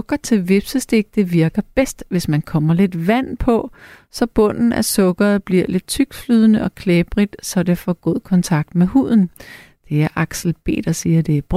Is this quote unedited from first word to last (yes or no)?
yes